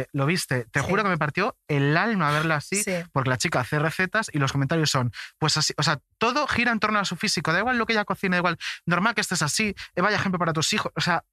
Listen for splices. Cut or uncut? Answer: uncut